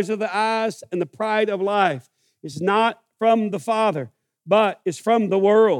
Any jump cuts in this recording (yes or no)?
no